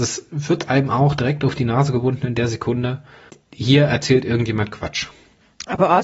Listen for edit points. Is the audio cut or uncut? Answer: cut